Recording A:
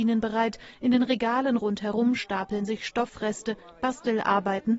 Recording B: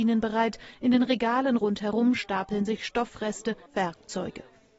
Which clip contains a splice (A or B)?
B